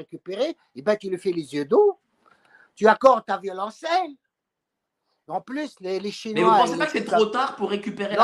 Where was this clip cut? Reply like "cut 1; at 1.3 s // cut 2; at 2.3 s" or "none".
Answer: none